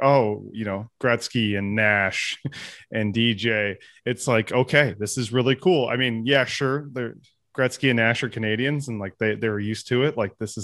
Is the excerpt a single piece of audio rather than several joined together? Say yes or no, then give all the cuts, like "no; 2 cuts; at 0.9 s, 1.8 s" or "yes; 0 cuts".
yes; 0 cuts